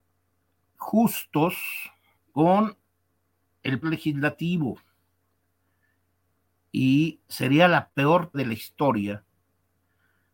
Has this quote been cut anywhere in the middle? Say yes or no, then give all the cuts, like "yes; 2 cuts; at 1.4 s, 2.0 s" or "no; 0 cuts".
yes; 4 cuts; at 2.2 s, 3.8 s, 7.2 s, 8.3 s